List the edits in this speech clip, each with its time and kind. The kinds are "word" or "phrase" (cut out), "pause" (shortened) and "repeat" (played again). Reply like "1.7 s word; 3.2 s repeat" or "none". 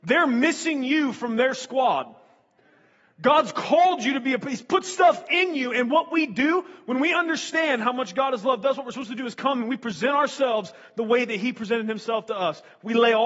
none